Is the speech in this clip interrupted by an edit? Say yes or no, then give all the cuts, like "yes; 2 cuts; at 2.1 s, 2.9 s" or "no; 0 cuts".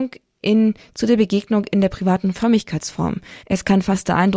yes; 1 cut; at 3.4 s